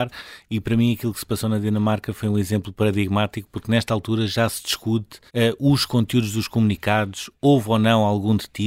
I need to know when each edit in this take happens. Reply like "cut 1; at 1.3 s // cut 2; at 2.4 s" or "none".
cut 1; at 5.3 s